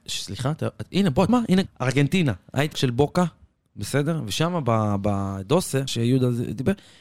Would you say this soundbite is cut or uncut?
cut